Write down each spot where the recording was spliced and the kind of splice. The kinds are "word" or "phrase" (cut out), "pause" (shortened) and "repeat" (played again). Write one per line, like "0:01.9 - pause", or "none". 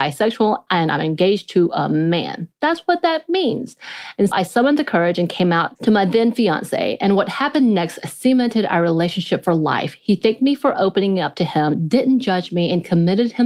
0:04.3 - word